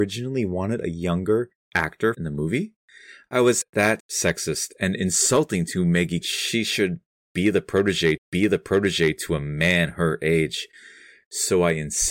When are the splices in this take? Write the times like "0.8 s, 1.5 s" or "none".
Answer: 2.1 s, 3.6 s, 4.0 s, 6.2 s, 8.2 s